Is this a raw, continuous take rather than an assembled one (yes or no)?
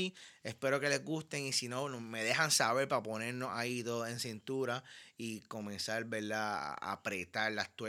yes